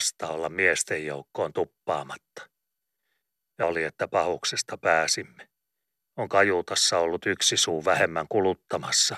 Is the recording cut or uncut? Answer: cut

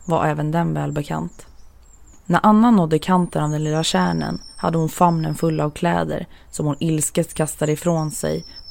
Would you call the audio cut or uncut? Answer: uncut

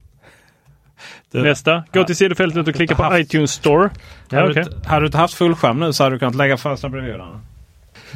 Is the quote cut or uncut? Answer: uncut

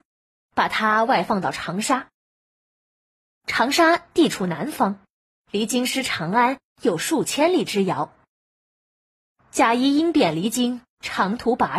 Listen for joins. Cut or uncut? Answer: uncut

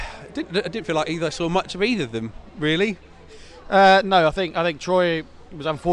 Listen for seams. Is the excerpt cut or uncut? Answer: uncut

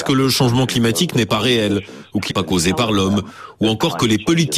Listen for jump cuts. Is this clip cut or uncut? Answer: cut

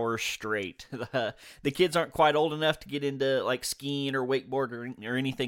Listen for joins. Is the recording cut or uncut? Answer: uncut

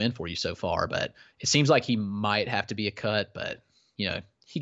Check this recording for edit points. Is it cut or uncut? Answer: uncut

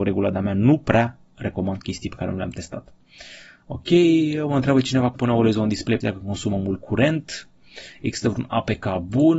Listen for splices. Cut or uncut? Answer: cut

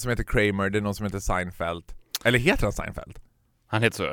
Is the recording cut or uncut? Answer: uncut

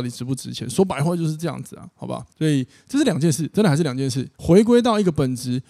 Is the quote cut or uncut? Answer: cut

